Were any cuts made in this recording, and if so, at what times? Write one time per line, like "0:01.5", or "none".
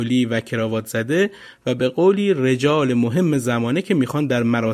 none